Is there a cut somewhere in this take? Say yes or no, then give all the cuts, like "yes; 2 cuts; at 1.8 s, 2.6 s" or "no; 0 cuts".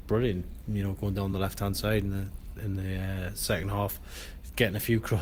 no; 0 cuts